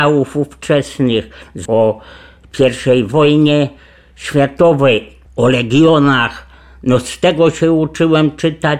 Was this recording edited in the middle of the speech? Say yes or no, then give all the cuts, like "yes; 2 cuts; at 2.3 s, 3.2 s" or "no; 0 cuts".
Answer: yes; 1 cut; at 1.7 s